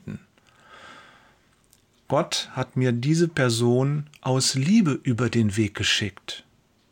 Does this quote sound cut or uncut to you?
cut